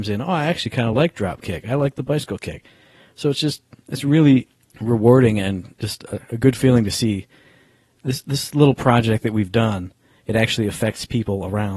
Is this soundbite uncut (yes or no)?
yes